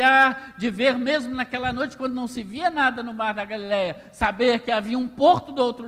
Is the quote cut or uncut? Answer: uncut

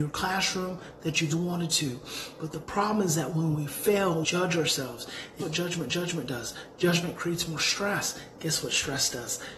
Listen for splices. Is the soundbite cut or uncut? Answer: cut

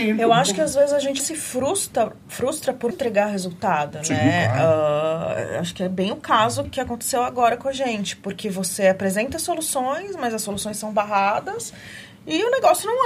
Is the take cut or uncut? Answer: cut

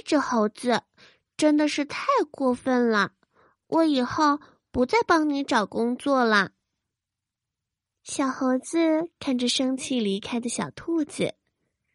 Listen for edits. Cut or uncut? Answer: uncut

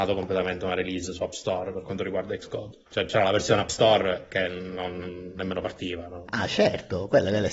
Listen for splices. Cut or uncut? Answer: uncut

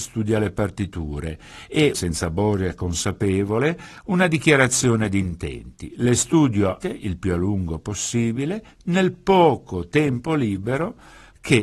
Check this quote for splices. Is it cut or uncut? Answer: cut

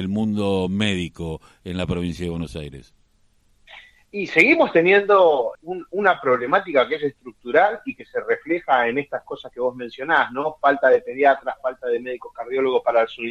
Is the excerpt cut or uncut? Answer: cut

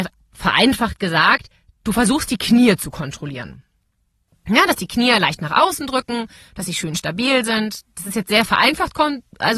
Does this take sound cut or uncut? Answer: uncut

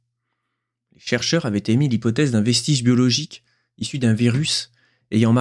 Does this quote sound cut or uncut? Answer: uncut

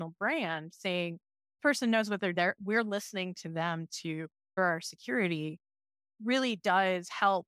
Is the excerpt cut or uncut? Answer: cut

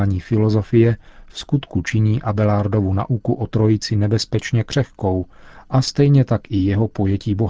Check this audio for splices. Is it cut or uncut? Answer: uncut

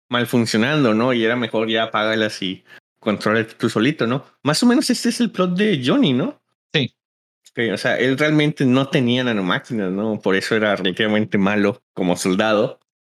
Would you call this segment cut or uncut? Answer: uncut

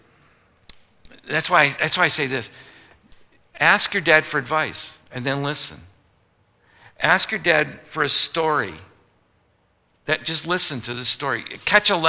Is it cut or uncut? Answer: uncut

